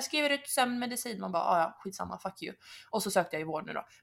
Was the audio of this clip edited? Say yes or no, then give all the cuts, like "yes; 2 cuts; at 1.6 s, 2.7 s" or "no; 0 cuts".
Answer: no; 0 cuts